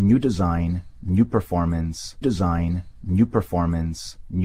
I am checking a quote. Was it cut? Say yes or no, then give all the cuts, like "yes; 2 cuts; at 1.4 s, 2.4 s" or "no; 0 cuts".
yes; 1 cut; at 2.2 s